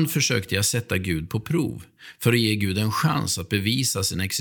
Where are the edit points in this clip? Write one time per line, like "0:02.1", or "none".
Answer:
none